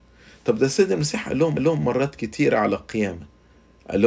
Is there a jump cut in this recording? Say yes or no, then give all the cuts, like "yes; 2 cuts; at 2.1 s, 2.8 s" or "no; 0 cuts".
yes; 1 cut; at 1.6 s